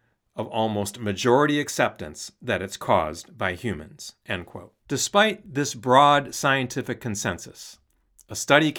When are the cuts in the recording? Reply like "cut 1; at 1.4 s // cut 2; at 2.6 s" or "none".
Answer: cut 1; at 4.8 s